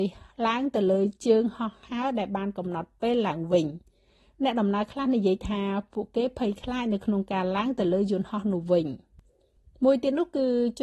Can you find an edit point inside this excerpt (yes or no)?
no